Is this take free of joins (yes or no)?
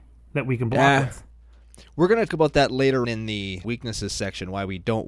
no